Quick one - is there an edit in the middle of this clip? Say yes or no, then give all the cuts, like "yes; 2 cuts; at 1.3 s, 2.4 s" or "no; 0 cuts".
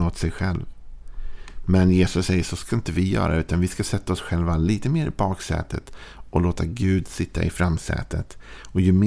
no; 0 cuts